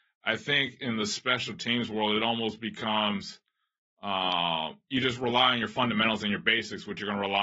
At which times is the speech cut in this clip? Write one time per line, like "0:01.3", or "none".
none